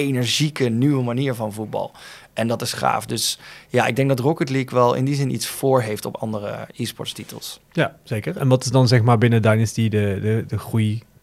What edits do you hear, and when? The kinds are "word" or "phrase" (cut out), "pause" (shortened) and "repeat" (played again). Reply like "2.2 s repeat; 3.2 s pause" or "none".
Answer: none